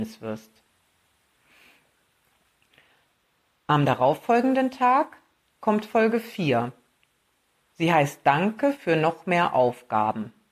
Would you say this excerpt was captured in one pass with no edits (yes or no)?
yes